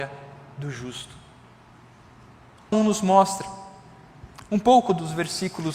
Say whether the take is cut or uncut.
cut